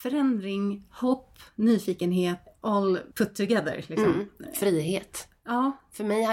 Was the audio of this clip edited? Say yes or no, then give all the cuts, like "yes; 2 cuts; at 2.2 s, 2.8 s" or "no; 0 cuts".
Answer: yes; 1 cut; at 3.1 s